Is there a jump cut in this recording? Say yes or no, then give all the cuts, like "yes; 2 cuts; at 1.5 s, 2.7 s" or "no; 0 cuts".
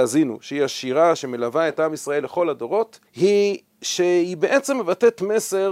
yes; 1 cut; at 3.1 s